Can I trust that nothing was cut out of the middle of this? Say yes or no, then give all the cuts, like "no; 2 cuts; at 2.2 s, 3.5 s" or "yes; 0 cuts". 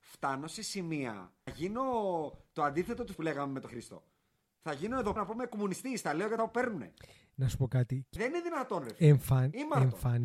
no; 6 cuts; at 1.5 s, 3.1 s, 3.7 s, 5.2 s, 6.4 s, 8.2 s